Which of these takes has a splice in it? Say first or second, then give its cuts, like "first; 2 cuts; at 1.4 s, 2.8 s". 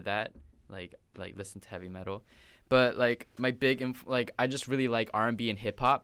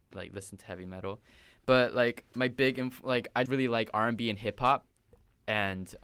second; 1 cut; at 3.5 s